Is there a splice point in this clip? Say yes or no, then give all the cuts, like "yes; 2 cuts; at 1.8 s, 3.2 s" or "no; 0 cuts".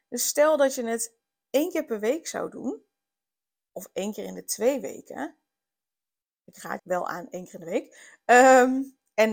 yes; 1 cut; at 6.8 s